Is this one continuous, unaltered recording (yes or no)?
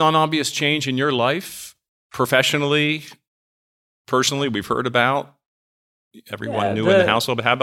yes